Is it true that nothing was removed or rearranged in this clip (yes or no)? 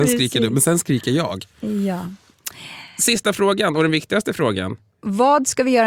no